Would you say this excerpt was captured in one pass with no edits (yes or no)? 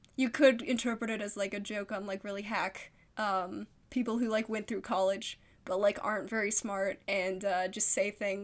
no